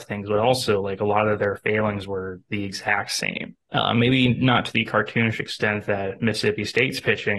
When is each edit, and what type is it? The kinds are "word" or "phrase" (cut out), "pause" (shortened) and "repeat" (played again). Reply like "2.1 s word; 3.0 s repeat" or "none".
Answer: 3.6 s pause